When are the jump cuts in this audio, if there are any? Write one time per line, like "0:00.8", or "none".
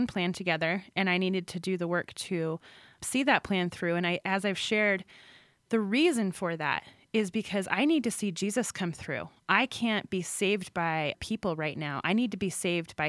0:11.1